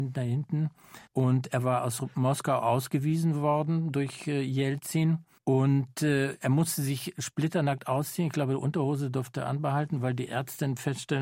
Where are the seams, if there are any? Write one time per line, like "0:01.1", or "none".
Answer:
0:01.1
0:05.4